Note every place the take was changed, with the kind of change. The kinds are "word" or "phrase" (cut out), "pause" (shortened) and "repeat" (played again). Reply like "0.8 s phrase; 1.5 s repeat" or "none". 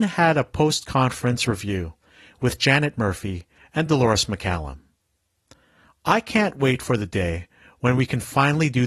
none